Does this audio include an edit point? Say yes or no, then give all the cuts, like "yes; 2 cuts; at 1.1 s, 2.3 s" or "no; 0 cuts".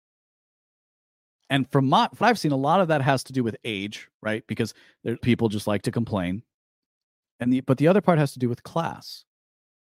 yes; 2 cuts; at 2.2 s, 5.2 s